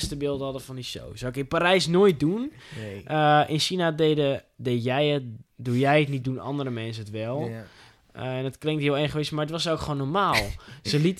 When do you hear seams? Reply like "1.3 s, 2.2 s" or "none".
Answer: 5.5 s

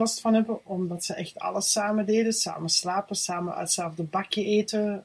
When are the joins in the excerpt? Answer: none

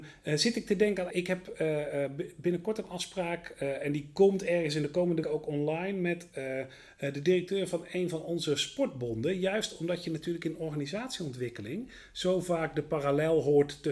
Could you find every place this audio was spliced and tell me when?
1.1 s, 5.2 s

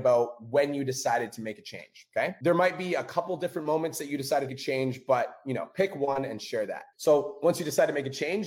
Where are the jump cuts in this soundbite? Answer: 4.5 s

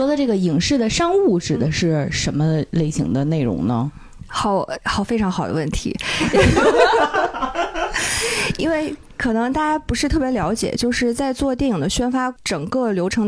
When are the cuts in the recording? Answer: 12.4 s

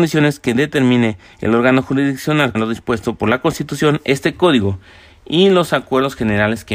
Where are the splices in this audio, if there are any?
2.5 s

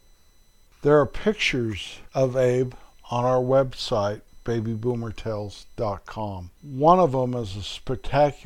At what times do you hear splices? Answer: 6.5 s

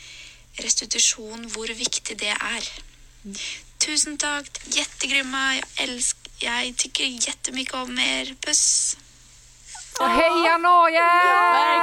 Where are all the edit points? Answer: 4.6 s, 10.0 s

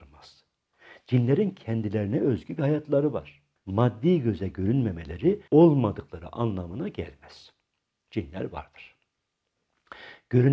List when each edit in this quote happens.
3.6 s, 5.5 s

